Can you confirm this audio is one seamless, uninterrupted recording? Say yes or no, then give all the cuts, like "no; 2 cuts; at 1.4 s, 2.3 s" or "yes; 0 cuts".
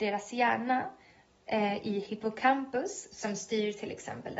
yes; 0 cuts